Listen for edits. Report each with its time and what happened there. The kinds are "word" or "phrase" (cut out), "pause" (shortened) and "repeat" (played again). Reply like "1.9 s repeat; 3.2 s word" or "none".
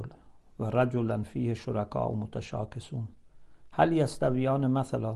none